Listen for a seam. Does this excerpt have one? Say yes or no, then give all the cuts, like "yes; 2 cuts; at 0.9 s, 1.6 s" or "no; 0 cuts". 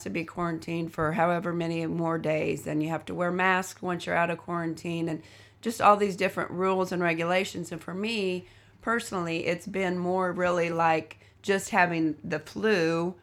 no; 0 cuts